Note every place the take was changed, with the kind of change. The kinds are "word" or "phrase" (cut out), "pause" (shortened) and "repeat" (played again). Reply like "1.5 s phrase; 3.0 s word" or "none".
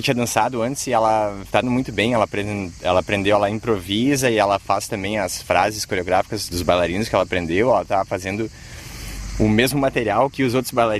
1.6 s word